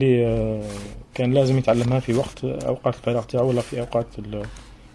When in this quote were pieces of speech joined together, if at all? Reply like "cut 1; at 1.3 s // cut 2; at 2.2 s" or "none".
cut 1; at 1.1 s